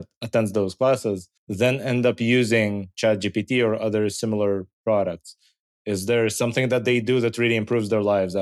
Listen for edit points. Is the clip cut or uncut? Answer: cut